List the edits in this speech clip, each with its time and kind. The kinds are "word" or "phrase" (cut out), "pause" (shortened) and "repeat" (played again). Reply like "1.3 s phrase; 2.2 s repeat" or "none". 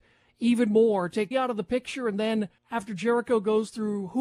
1.3 s word; 2.6 s pause